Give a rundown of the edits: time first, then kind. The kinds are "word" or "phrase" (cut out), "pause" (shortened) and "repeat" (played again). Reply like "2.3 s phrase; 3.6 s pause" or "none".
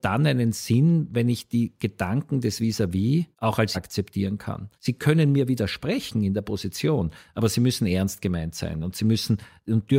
3.3 s pause; 3.7 s word; 4.7 s pause